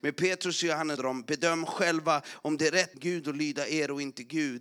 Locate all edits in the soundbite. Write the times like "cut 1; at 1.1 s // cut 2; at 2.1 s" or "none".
cut 1; at 1.0 s // cut 2; at 2.9 s